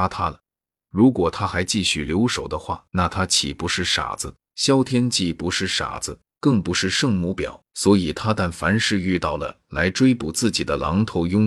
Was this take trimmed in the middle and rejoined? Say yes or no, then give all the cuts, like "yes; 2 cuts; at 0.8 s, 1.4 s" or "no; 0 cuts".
yes; 4 cuts; at 2.9 s, 4.4 s, 6.3 s, 7.7 s